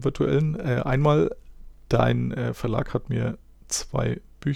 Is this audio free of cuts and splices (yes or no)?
yes